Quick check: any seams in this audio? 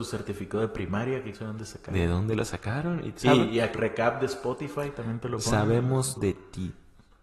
yes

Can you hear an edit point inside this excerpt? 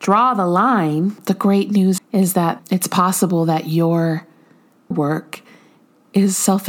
yes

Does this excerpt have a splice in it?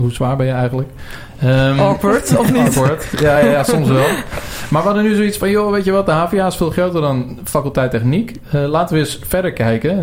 no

